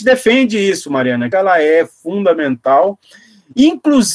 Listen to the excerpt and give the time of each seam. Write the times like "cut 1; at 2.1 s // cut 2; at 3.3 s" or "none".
cut 1; at 1.3 s

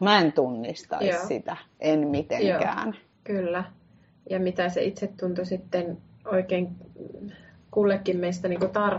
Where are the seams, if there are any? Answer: cut 1; at 3.1 s

